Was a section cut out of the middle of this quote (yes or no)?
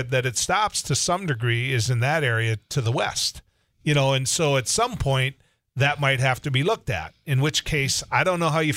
no